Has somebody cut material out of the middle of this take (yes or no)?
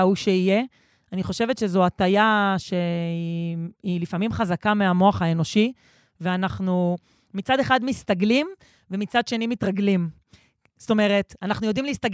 no